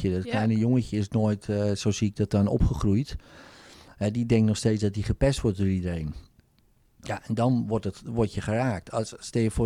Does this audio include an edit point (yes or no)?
no